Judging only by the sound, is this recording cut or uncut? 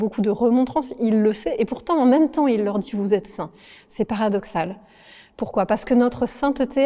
uncut